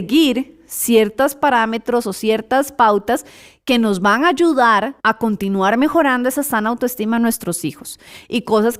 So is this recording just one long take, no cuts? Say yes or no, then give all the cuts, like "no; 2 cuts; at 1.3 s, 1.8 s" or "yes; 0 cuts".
no; 1 cut; at 5.0 s